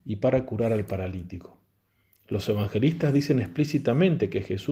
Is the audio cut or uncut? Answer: uncut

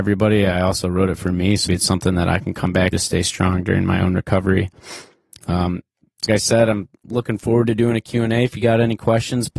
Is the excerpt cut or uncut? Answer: cut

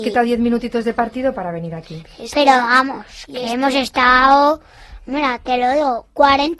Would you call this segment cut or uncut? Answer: uncut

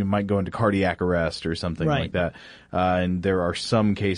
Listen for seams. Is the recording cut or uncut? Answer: uncut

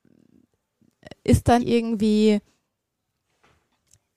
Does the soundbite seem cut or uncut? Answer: cut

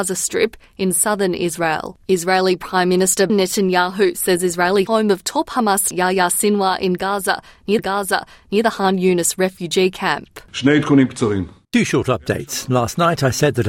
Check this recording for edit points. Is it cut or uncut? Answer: cut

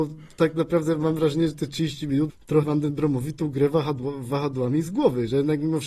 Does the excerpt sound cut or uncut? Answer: cut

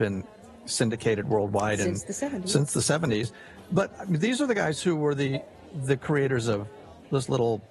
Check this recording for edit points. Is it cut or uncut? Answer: uncut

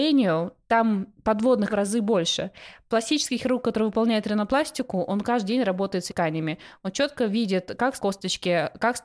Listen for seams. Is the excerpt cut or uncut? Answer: cut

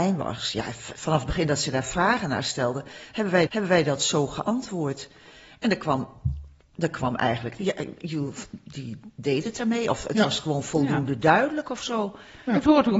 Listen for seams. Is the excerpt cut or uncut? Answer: cut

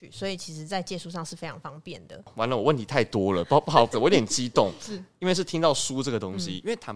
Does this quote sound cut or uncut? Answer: cut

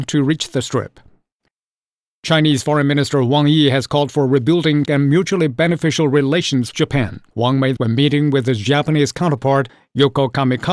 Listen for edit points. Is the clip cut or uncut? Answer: cut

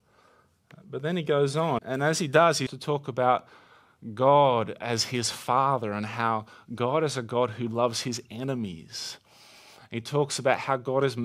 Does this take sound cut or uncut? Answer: cut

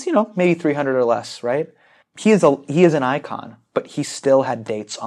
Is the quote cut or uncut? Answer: uncut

